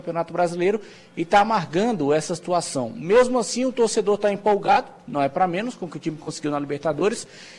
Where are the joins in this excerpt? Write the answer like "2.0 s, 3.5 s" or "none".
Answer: none